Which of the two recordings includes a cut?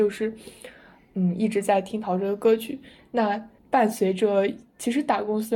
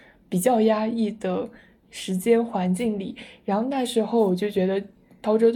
first; 1 cut; at 3.6 s

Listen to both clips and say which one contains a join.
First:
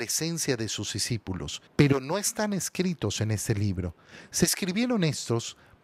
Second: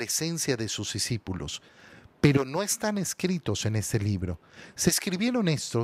first; 1 cut; at 1.7 s

